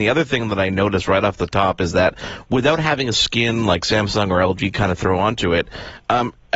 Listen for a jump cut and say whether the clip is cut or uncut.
uncut